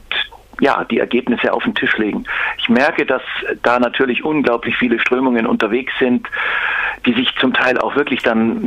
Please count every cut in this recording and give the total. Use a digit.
0